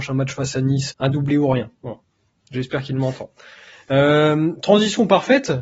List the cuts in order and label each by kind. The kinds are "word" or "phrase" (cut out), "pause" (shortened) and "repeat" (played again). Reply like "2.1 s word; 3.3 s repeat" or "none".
0.9 s word